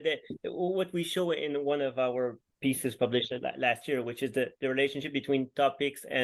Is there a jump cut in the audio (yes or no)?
no